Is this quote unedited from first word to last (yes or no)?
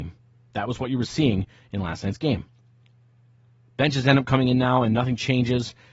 yes